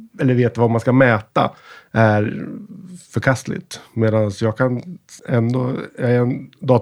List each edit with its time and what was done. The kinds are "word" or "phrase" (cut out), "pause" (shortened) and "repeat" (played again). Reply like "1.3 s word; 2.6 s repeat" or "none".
5.2 s pause